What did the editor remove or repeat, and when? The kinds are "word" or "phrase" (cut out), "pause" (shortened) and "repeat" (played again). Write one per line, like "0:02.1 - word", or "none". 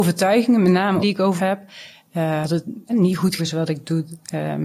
0:01.0 - word
0:01.4 - word
0:02.4 - word
0:02.9 - word
0:03.4 - word